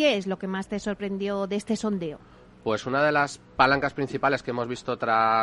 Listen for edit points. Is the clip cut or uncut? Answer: uncut